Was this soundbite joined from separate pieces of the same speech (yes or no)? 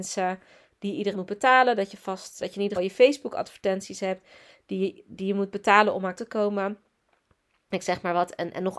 yes